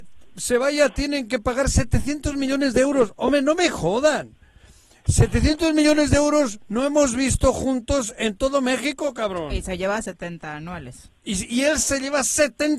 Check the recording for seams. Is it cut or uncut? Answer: uncut